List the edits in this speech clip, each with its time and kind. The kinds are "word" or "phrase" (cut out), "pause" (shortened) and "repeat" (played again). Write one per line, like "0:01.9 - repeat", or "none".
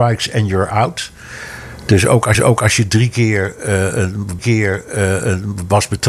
0:02.3 - repeat
0:04.4 - repeat

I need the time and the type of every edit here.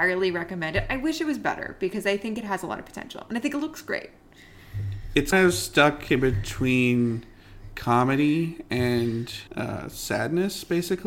0:05.3 - word
0:09.5 - pause

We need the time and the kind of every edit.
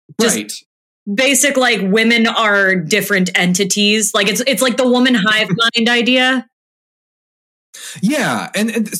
none

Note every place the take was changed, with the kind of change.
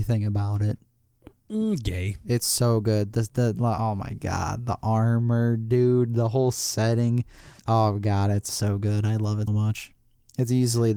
0:07.6 - pause
0:08.5 - word
0:09.5 - word

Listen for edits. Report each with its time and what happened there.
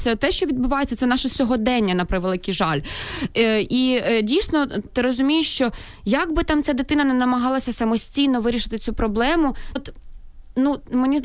0:04.9 - word
0:09.8 - word

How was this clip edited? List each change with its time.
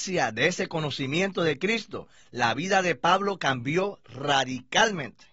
none

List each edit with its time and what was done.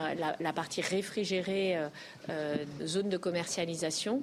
0:02.8 - word

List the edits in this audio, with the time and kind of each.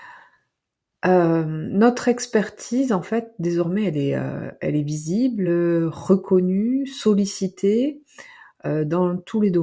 none

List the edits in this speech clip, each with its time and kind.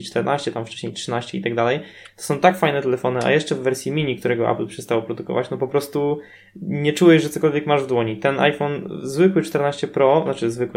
none

